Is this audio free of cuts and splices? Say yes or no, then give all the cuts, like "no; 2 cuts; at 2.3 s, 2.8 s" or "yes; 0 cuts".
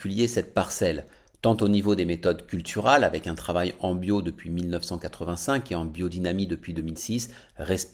yes; 0 cuts